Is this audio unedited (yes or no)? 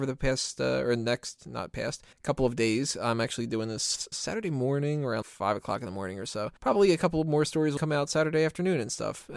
no